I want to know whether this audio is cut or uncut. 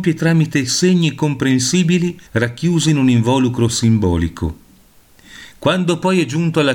cut